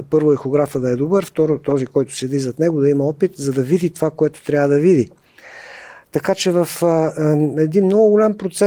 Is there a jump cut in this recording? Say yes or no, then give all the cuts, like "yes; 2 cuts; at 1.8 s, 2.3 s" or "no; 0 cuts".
no; 0 cuts